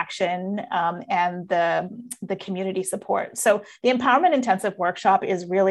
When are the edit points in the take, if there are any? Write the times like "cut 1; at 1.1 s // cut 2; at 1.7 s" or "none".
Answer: none